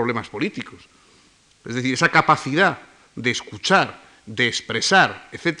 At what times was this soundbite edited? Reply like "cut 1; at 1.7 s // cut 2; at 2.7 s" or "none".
none